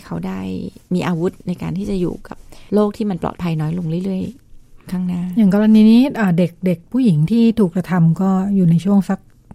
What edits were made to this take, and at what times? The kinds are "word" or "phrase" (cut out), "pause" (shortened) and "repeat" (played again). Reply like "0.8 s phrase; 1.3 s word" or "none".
2.7 s pause; 4.4 s pause